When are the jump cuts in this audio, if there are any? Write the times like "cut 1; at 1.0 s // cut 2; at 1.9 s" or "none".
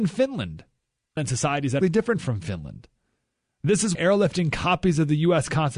cut 1; at 1.2 s // cut 2; at 1.8 s // cut 3; at 3.9 s